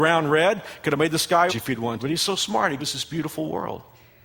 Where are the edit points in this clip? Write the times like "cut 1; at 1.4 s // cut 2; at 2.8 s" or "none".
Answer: cut 1; at 1.5 s // cut 2; at 2.0 s // cut 3; at 2.8 s